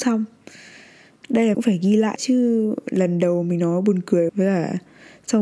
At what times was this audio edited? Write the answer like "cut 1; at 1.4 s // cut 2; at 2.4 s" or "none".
cut 1; at 1.5 s // cut 2; at 2.2 s // cut 3; at 4.3 s

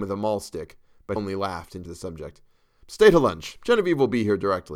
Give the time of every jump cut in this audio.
cut 1; at 1.2 s // cut 2; at 1.8 s

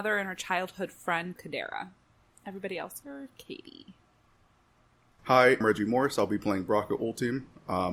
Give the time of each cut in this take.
cut 1; at 1.4 s // cut 2; at 3.0 s // cut 3; at 5.6 s

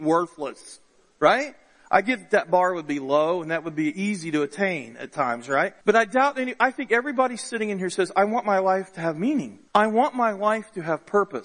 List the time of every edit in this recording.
cut 1; at 5.8 s // cut 2; at 9.7 s

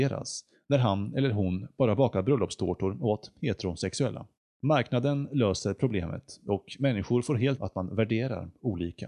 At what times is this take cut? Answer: cut 1; at 4.4 s // cut 2; at 7.6 s

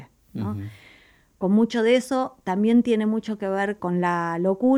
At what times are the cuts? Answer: none

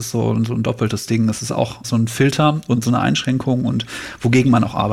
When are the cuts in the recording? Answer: cut 1; at 1.8 s

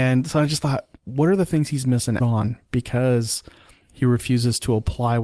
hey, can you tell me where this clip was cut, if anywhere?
cut 1; at 2.2 s

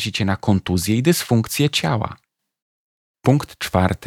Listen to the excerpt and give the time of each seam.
none

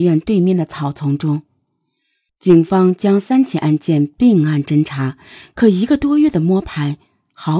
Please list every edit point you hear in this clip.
none

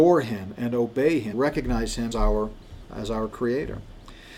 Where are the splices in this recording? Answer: cut 1; at 1.3 s // cut 2; at 2.1 s // cut 3; at 2.8 s

